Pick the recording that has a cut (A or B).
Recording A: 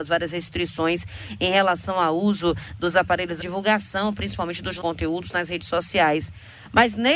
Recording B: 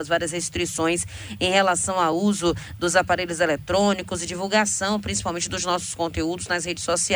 A